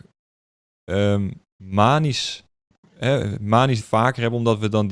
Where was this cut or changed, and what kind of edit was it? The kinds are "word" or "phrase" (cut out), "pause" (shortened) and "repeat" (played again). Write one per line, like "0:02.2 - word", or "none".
0:01.5 - pause
0:03.8 - word